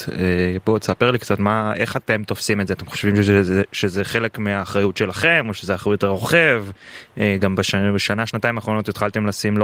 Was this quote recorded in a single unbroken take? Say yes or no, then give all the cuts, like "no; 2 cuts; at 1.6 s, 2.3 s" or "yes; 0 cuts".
yes; 0 cuts